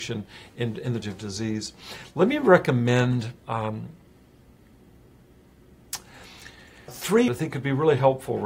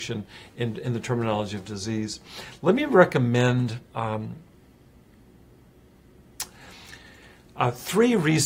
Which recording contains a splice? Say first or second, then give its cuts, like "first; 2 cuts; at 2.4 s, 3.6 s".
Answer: first; 3 cuts; at 1.0 s, 6.9 s, 7.3 s